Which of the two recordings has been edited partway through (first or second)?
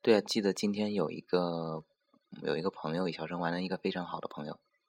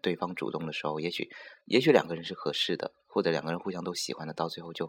second